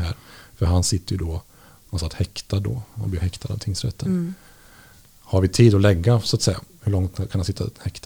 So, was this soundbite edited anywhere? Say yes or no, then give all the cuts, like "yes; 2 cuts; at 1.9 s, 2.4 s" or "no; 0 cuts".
no; 0 cuts